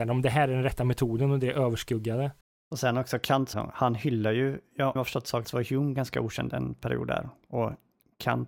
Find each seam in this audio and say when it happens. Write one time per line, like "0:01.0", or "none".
0:02.4
0:03.5
0:05.0
0:05.4